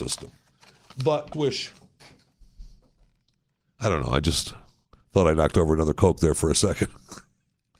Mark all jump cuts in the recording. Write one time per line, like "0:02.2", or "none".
0:01.3
0:04.8